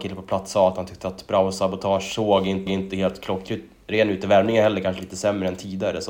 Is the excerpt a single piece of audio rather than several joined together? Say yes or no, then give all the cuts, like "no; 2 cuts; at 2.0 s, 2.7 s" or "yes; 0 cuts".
no; 1 cut; at 2.7 s